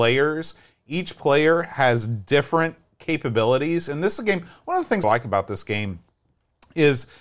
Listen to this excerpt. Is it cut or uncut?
cut